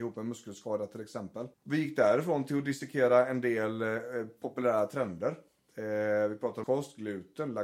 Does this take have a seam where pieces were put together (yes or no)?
yes